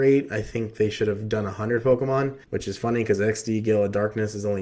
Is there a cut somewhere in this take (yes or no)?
yes